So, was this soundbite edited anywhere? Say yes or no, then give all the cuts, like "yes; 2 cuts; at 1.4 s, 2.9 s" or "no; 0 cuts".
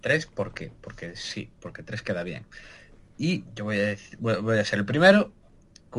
yes; 1 cut; at 3.5 s